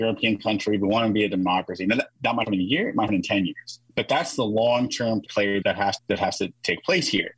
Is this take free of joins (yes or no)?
no